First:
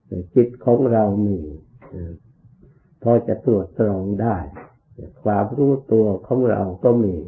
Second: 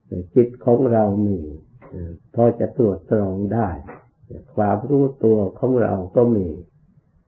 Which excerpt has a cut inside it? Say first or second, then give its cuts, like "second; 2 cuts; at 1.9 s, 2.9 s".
second; 1 cut; at 2.3 s